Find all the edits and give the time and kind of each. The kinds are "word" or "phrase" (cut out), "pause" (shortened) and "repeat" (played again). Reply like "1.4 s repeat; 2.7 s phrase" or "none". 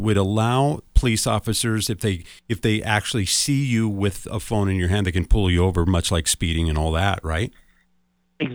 2.4 s pause